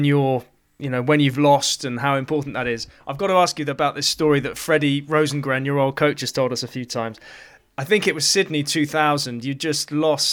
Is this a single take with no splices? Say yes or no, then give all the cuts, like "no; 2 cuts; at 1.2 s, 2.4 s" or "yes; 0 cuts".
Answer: yes; 0 cuts